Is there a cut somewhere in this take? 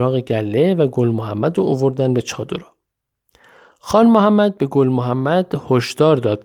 no; 0 cuts

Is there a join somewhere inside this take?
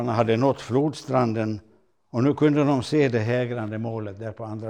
no; 0 cuts

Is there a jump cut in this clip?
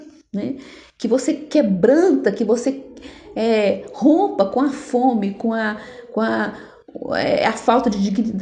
no; 0 cuts

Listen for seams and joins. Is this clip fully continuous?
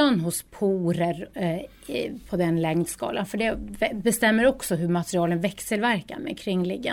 yes; 0 cuts

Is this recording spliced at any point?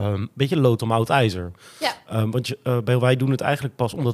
no; 0 cuts

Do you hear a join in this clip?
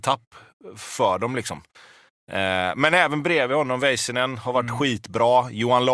no; 0 cuts

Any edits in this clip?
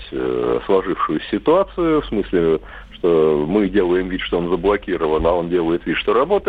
no; 0 cuts

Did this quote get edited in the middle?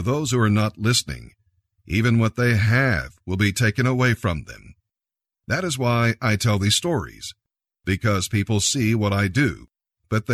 no; 0 cuts

